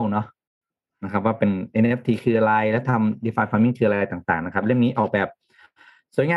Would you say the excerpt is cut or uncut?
uncut